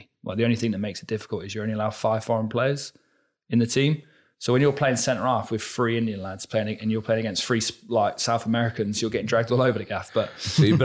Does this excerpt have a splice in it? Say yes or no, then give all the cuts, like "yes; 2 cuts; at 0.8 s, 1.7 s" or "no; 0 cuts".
no; 0 cuts